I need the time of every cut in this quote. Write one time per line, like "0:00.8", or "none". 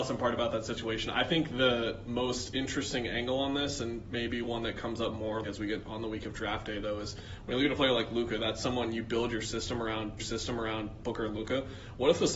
0:05.4
0:10.2